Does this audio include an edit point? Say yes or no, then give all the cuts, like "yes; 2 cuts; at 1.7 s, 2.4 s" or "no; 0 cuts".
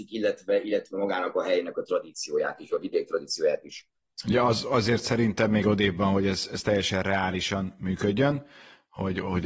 no; 0 cuts